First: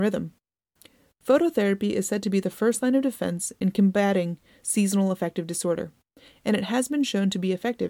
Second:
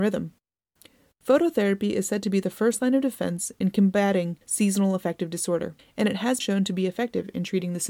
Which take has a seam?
second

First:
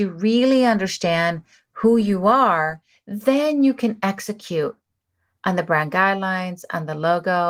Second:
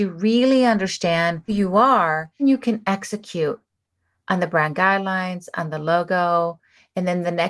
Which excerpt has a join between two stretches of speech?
second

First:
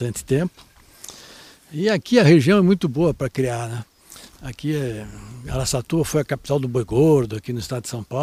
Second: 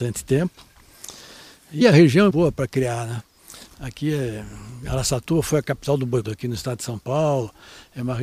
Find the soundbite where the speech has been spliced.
second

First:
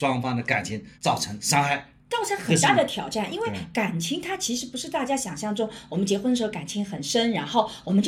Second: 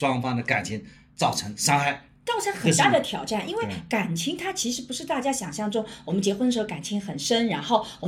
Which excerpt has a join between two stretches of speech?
first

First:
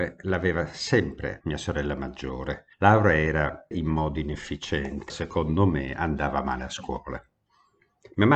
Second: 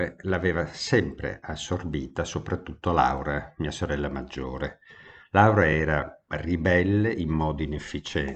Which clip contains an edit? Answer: first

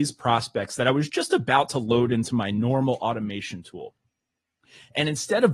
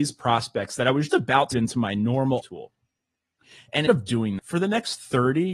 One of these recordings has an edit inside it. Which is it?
second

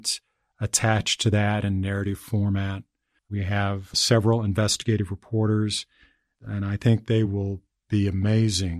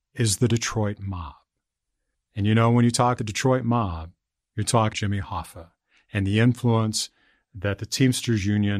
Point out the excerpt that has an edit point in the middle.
second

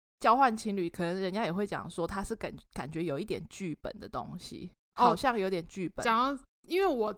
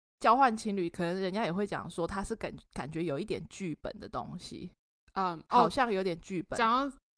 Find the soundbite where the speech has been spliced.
first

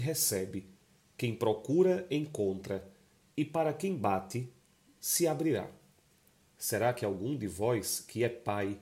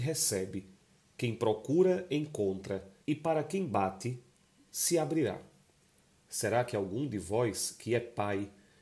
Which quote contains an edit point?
second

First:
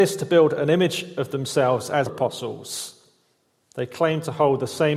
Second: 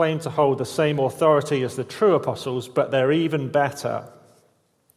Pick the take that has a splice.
first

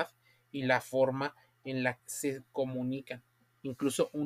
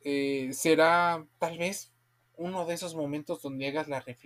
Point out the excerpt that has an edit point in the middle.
first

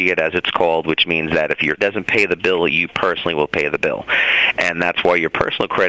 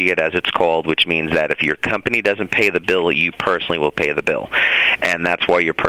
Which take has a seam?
first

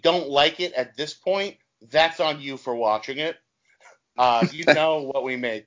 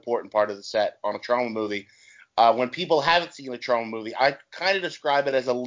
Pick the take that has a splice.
first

